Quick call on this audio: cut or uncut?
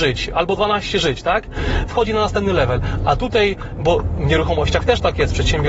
uncut